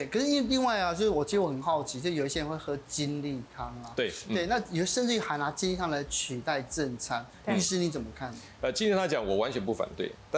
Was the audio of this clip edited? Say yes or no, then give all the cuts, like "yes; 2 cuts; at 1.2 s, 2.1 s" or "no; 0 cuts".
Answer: no; 0 cuts